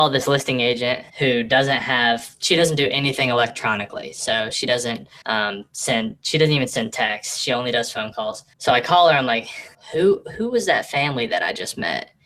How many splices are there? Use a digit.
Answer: 4